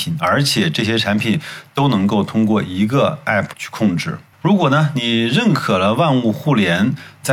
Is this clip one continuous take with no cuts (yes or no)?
yes